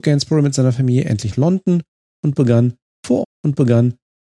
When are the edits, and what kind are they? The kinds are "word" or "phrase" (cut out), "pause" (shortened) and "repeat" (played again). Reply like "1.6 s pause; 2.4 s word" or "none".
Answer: 1.3 s word; 3.2 s repeat